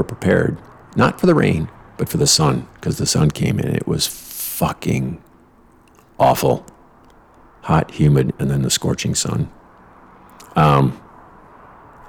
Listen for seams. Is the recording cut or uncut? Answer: uncut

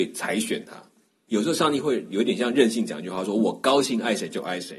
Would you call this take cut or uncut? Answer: uncut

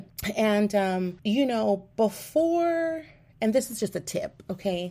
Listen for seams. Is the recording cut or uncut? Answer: uncut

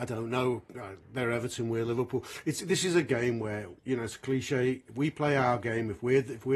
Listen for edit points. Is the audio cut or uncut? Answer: cut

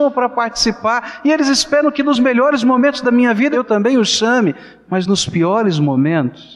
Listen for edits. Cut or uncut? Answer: uncut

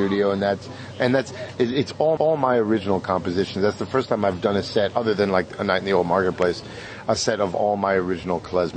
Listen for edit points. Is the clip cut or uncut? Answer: cut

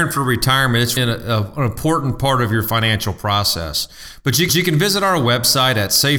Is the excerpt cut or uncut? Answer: cut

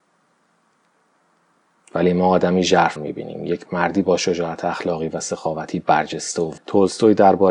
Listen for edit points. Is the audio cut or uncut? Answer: cut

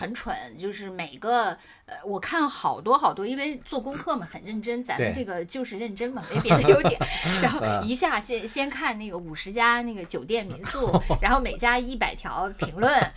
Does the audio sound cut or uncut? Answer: uncut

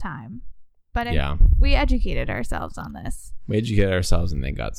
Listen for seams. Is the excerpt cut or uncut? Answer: uncut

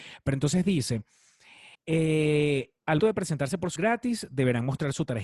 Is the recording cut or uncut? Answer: cut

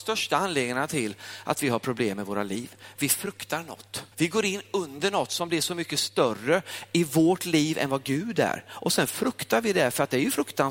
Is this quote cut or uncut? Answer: cut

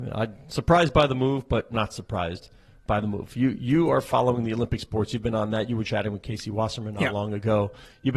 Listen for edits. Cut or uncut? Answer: uncut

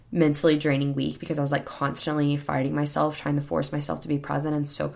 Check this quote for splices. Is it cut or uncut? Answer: uncut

